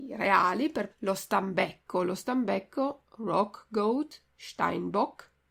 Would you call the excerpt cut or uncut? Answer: cut